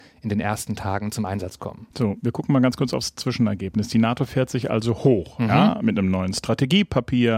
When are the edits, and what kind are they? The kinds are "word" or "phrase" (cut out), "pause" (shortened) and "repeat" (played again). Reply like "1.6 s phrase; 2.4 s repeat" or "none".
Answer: 1.9 s pause